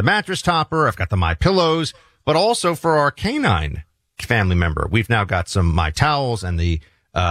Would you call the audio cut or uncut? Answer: uncut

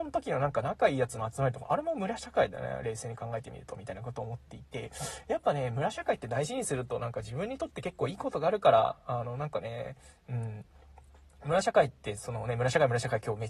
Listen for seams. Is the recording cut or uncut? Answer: uncut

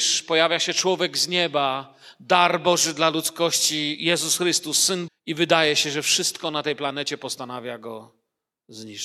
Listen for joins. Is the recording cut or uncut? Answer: cut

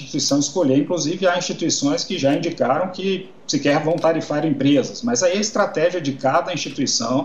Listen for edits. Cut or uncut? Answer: uncut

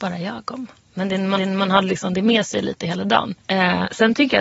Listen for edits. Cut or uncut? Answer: cut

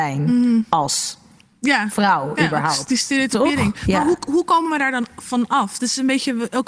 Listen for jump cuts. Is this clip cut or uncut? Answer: uncut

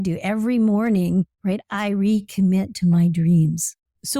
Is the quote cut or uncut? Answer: cut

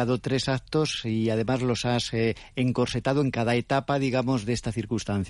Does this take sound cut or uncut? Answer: uncut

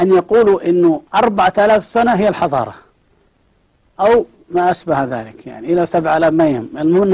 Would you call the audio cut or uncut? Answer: cut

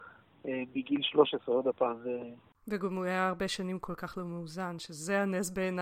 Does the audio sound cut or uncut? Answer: uncut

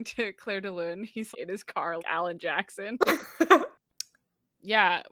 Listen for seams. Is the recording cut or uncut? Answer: cut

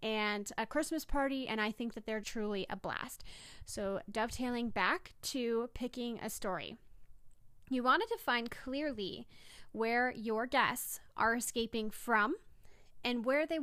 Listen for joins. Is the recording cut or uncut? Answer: cut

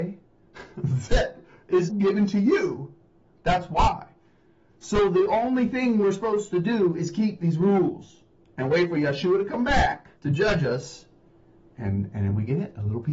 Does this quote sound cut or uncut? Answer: cut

